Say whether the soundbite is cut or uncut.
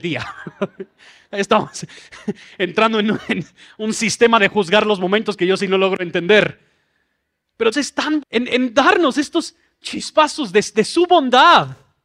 cut